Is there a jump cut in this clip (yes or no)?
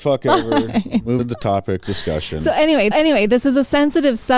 yes